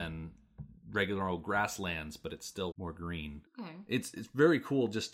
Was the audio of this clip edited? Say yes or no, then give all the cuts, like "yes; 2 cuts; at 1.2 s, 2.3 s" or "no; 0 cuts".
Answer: yes; 1 cut; at 2.7 s